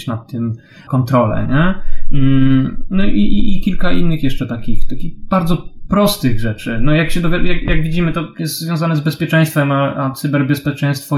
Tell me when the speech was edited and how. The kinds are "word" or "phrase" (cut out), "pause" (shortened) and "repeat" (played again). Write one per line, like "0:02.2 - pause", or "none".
none